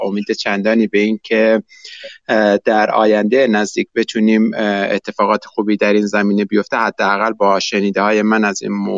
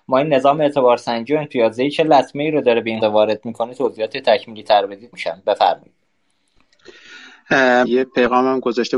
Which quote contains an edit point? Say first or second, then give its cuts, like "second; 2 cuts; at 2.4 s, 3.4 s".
second; 3 cuts; at 3.0 s, 5.1 s, 7.8 s